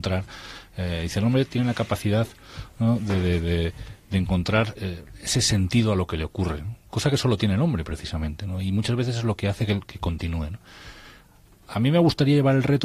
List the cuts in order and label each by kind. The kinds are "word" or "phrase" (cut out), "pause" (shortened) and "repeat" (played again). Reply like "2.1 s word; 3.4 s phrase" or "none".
4.8 s word